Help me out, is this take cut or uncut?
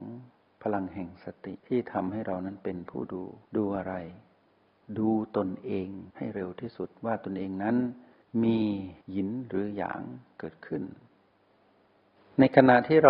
cut